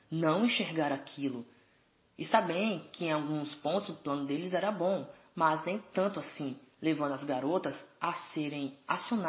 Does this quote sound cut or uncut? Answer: uncut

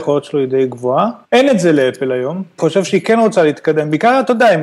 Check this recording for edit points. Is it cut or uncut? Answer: cut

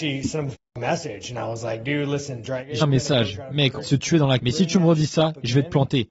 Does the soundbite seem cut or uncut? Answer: cut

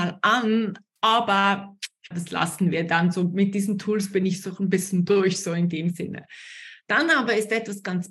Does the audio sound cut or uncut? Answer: cut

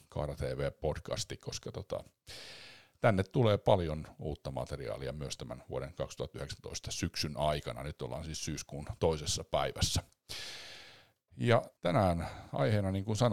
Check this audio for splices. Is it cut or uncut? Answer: cut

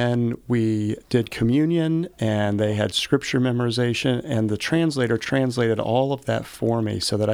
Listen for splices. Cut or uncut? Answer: uncut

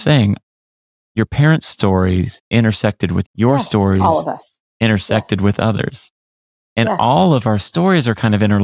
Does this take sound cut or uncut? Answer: cut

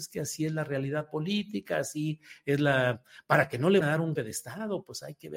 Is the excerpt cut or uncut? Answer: cut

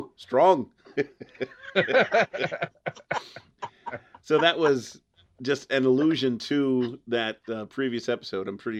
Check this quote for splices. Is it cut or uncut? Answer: uncut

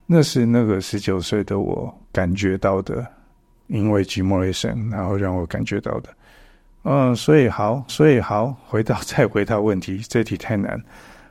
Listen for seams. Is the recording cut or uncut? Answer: cut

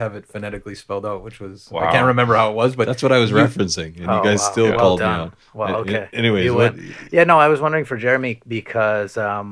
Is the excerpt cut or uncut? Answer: uncut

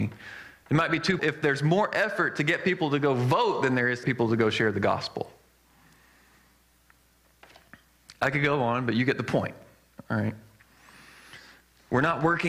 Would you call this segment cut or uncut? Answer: cut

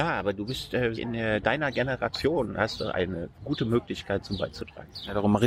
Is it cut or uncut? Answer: cut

